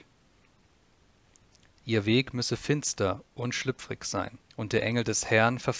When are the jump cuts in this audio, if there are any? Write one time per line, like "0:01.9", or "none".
0:04.4